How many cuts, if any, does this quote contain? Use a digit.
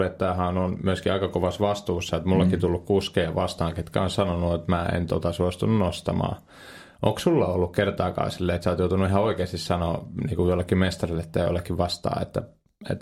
0